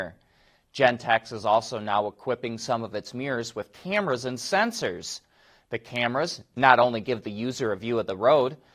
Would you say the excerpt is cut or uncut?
uncut